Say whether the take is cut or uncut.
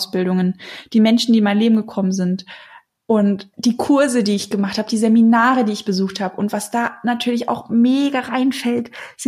cut